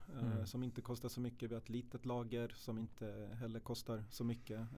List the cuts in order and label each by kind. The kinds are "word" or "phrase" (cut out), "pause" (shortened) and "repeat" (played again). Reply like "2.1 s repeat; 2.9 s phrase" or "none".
none